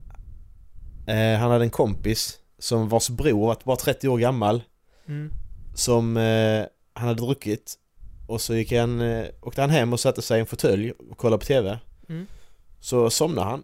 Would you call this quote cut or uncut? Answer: uncut